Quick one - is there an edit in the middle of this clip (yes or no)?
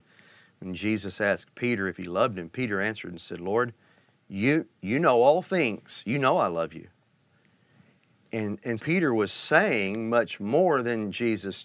yes